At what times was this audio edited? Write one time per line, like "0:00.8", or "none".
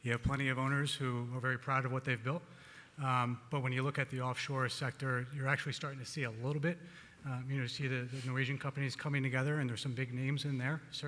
none